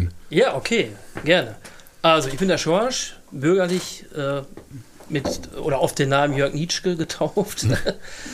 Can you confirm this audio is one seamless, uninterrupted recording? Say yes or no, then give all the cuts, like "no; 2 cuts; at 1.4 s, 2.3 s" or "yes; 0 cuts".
yes; 0 cuts